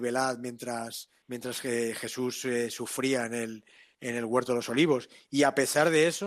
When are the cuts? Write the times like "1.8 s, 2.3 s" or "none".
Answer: none